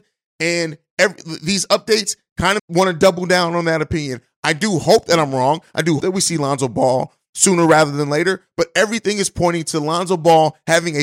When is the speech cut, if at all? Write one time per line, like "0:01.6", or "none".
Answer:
0:02.6
0:06.0